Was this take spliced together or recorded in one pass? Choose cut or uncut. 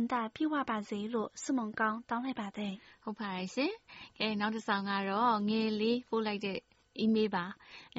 uncut